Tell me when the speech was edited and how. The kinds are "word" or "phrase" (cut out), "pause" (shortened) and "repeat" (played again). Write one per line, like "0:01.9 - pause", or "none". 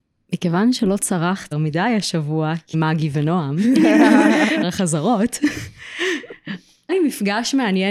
0:01.5 - word
0:02.7 - word
0:04.6 - word
0:06.9 - word